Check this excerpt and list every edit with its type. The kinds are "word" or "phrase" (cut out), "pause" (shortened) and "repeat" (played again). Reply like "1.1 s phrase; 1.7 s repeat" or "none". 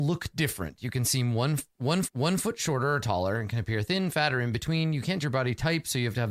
2.0 s repeat; 5.2 s word